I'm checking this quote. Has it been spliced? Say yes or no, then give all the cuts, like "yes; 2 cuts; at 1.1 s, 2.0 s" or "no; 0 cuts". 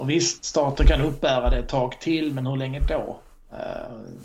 no; 0 cuts